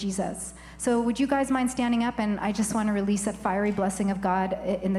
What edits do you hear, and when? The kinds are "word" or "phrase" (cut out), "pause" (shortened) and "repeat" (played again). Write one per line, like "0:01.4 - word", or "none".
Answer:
none